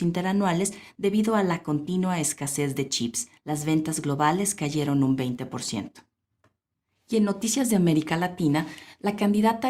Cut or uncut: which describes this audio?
cut